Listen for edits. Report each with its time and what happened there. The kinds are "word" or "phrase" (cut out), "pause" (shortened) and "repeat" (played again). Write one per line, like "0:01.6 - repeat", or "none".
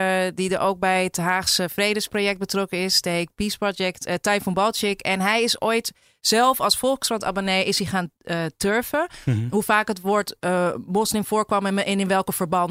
none